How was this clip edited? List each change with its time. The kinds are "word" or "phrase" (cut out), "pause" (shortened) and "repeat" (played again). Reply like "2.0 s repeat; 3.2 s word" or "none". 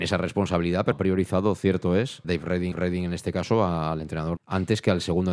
0.9 s word; 2.2 s word; 2.7 s repeat; 4.4 s phrase